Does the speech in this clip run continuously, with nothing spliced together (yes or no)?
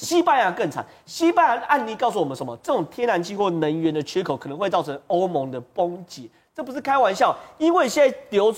yes